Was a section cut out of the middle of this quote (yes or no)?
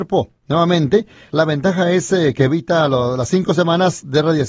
no